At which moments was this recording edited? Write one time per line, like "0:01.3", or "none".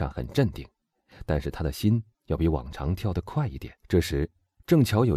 0:03.8